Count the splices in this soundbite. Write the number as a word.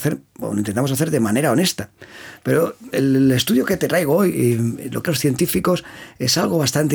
two